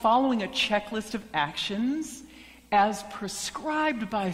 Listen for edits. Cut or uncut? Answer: uncut